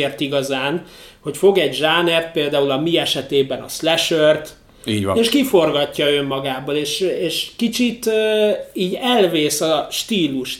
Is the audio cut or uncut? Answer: uncut